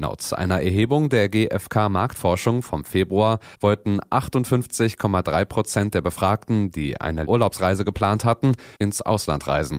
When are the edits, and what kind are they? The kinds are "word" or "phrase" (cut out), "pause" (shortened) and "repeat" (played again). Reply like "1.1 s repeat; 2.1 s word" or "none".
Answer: 3.5 s pause; 7.3 s word; 8.7 s pause